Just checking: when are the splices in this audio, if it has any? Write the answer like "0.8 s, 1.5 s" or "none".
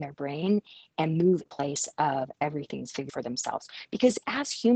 1.5 s, 3.1 s